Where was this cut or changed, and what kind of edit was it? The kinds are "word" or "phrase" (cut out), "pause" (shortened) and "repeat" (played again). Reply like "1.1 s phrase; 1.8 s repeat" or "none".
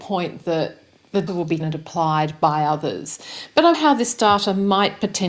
1.3 s word; 1.6 s word; 3.7 s word